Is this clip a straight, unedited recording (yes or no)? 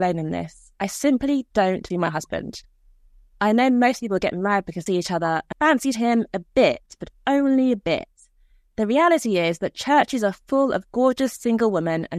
no